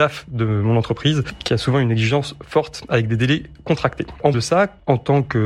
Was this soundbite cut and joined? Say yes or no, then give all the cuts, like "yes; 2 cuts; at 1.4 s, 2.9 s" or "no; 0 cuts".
yes; 1 cut; at 4.3 s